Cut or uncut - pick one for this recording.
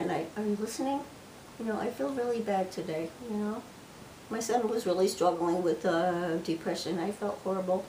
uncut